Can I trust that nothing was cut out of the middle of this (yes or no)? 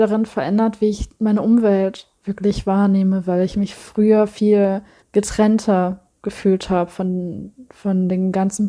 no